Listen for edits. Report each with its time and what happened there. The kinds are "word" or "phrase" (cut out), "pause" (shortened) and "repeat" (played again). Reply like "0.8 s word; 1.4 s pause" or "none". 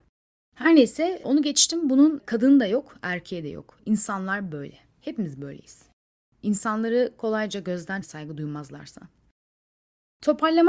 8.0 s phrase